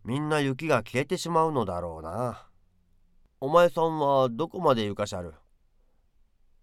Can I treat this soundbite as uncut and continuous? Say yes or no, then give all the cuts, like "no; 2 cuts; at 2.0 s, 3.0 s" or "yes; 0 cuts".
yes; 0 cuts